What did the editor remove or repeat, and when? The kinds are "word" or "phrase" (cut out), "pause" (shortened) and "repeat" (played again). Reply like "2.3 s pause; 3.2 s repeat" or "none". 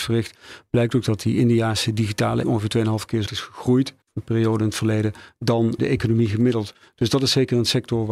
2.4 s word; 3.3 s word; 4.0 s pause; 5.8 s word